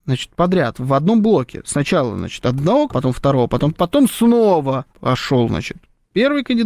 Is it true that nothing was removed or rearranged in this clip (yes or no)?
no